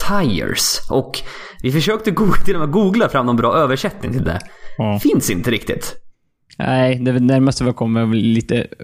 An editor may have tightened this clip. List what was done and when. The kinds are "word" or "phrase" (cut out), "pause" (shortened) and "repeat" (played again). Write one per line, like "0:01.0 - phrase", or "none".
none